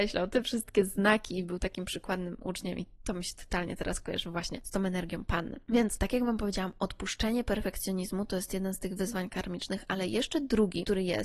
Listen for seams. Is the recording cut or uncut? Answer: uncut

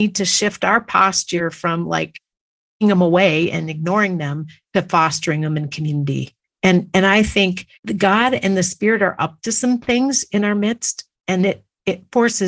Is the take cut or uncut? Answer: cut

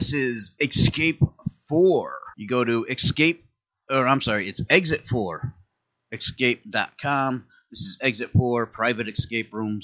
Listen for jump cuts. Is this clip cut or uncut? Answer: cut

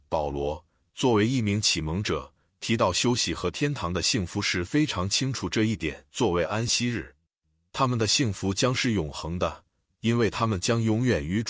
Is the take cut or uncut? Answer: cut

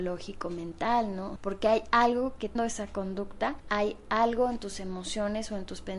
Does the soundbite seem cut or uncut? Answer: cut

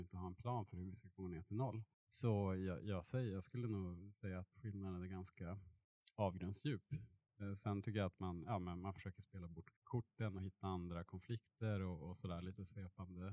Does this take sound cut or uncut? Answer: cut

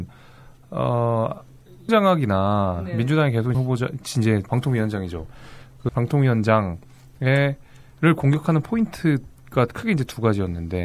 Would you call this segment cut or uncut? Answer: cut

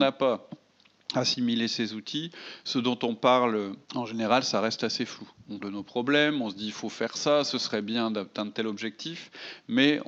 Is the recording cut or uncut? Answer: cut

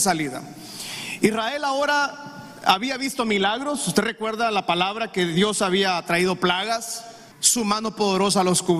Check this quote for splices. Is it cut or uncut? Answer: cut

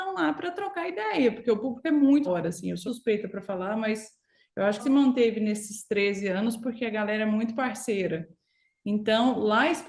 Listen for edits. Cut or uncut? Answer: cut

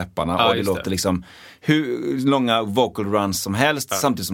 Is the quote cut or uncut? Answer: uncut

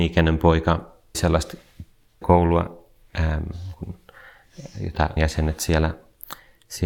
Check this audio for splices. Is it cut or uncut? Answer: cut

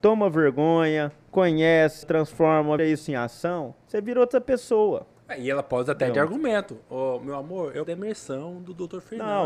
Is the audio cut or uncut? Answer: cut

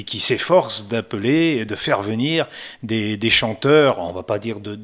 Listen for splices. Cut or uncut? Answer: uncut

